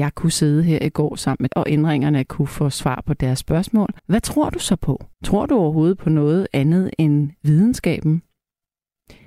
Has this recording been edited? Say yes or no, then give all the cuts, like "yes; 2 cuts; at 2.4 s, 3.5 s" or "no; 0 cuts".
yes; 3 cuts; at 1.5 s, 4.0 s, 5.1 s